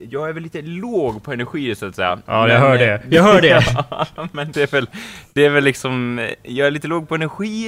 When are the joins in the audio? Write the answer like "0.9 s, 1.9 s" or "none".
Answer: 4.5 s